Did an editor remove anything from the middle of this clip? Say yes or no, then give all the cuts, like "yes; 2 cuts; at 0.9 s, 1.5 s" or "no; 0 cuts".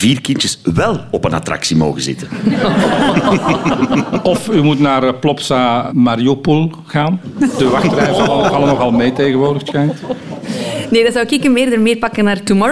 yes; 1 cut; at 5.9 s